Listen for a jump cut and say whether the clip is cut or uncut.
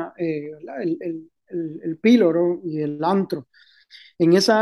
uncut